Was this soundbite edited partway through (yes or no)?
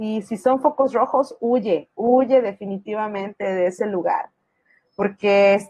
no